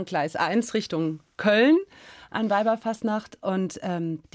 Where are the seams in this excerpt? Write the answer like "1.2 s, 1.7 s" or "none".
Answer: none